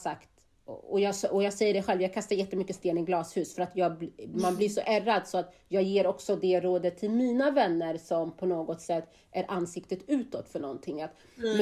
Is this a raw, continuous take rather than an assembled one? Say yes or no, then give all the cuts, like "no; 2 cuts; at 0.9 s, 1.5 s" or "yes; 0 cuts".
yes; 0 cuts